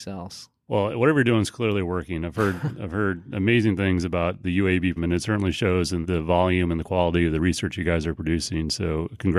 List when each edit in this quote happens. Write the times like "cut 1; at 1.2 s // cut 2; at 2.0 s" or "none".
cut 1; at 5.0 s // cut 2; at 6.0 s